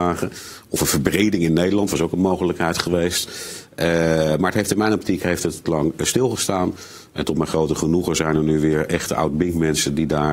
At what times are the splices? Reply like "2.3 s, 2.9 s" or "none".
5.6 s

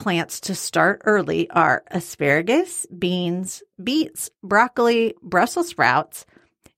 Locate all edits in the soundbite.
none

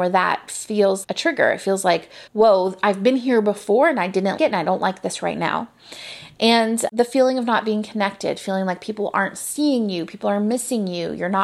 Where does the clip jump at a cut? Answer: 1.0 s, 2.3 s, 4.4 s

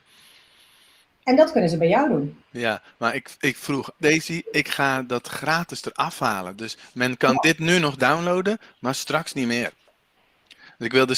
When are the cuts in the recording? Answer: 4.0 s

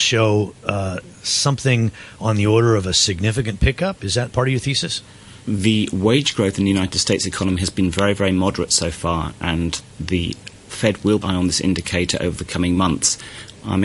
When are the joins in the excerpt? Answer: 4.3 s, 5.4 s, 11.2 s

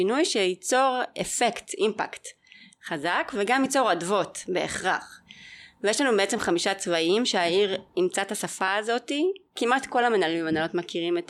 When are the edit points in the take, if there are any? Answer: none

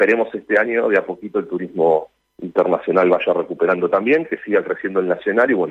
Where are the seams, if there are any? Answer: none

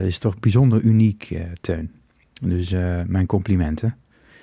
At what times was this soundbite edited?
none

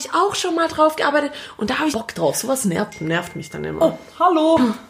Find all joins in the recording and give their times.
1.9 s

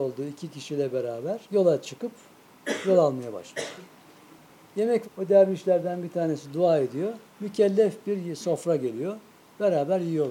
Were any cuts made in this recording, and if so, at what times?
1.4 s, 5.0 s, 7.2 s

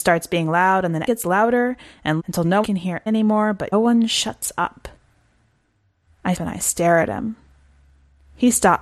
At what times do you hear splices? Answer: 1.1 s, 2.2 s, 2.6 s, 3.1 s, 3.7 s, 6.3 s

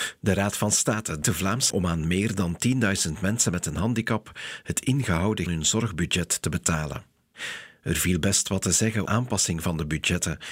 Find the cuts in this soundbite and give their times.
1.2 s, 1.7 s, 5.5 s, 9.1 s

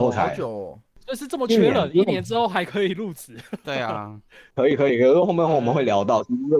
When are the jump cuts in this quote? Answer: none

